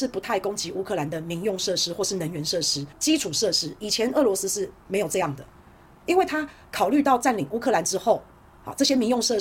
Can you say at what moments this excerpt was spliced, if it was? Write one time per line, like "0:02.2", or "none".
0:02.9